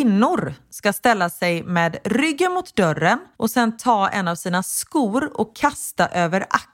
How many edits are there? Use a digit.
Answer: 1